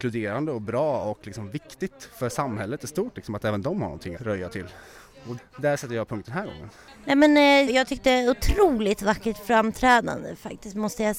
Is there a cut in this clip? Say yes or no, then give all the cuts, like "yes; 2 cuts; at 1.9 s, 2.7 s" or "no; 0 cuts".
yes; 3 cuts; at 4.2 s, 5.4 s, 7.7 s